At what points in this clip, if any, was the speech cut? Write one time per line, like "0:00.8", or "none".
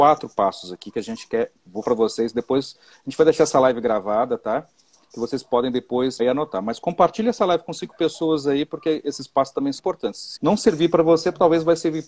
0:01.8
0:06.2
0:09.8
0:10.4